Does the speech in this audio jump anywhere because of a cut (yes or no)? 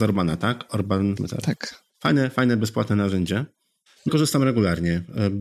yes